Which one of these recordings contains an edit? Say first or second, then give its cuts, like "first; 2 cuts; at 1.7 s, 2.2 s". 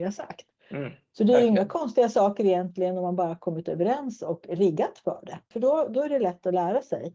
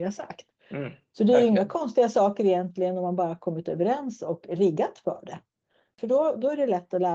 first; 1 cut; at 5.5 s